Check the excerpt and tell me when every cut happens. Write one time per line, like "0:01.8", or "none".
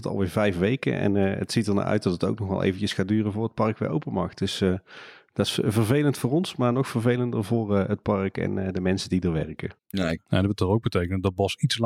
0:09.8